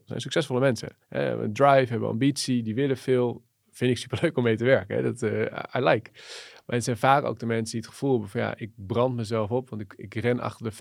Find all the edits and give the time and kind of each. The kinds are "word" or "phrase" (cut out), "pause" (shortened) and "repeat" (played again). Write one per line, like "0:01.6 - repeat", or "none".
0:01.0 - pause